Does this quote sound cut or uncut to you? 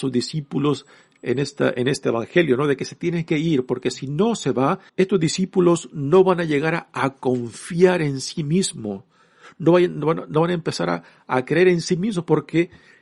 cut